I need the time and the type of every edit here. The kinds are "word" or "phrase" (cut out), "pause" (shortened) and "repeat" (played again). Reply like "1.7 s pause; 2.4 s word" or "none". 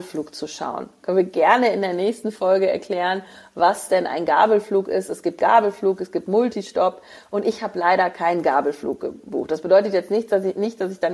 none

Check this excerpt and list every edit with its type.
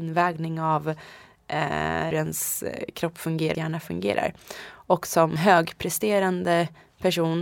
2.1 s word; 3.5 s phrase; 5.4 s word

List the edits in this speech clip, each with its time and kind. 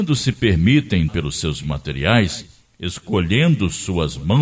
1.1 s word; 1.6 s word

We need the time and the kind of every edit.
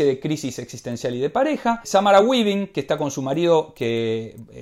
none

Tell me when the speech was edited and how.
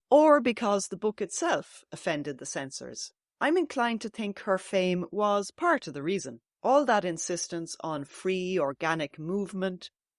none

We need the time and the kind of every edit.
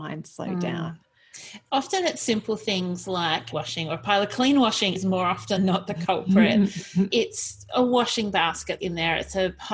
3.5 s phrase; 4.9 s word; 5.6 s word; 7.1 s word; 8.8 s word

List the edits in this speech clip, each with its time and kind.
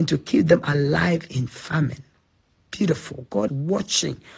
3.5 s word

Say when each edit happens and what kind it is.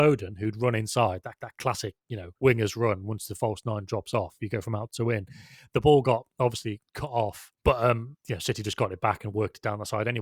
1.4 s repeat; 2.3 s pause; 6.9 s pause; 7.6 s pause; 8.2 s pause

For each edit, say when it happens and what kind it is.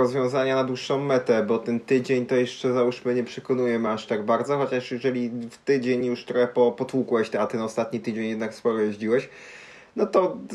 none

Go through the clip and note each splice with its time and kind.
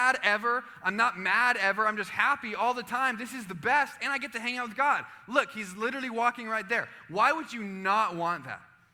none

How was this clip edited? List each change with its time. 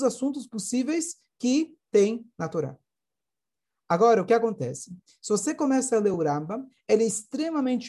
none

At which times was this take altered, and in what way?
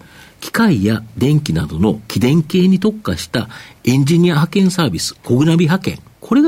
5.2 s pause

